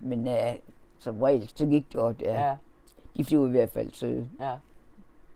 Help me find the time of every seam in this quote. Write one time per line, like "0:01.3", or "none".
0:01.0
0:01.5
0:01.9
0:03.3